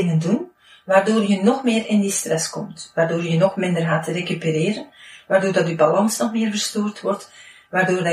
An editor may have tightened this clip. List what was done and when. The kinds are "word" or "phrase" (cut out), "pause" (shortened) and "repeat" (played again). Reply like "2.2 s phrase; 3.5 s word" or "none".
none